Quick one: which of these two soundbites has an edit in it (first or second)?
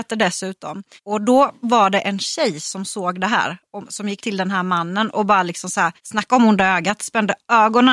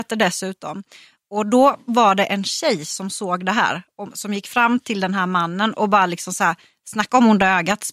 first